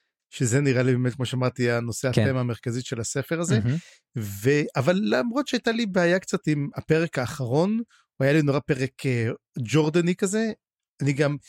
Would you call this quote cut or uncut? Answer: uncut